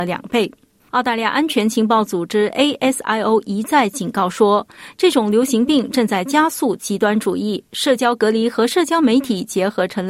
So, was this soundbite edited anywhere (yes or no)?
no